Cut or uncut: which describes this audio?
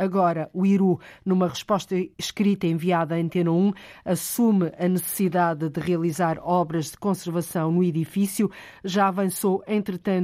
cut